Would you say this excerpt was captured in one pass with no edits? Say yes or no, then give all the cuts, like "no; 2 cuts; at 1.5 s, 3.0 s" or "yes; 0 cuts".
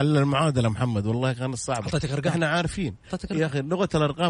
yes; 0 cuts